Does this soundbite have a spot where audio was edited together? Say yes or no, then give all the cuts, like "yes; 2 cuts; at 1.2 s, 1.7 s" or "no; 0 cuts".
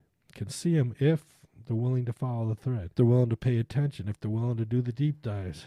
yes; 1 cut; at 2.9 s